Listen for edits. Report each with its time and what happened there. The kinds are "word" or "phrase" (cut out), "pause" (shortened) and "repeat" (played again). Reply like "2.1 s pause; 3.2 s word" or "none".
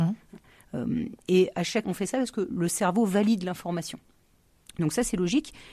1.8 s word; 2.5 s word